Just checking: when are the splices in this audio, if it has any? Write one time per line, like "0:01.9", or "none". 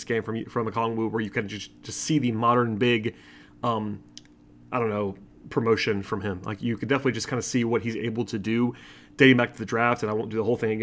none